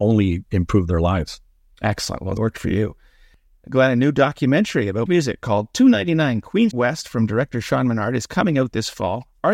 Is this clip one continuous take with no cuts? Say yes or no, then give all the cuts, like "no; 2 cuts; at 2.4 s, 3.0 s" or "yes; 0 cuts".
no; 3 cuts; at 2.4 s, 5.1 s, 6.7 s